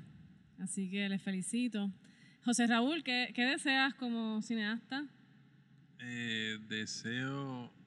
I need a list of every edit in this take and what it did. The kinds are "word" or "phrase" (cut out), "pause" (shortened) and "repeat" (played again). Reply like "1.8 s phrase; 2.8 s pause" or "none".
none